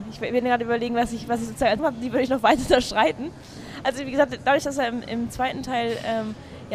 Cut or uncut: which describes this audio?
cut